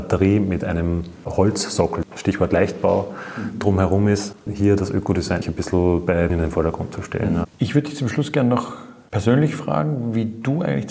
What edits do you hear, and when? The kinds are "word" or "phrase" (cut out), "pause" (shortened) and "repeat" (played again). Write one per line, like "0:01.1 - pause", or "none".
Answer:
0:04.5 - word
0:05.4 - word
0:06.3 - word
0:07.5 - pause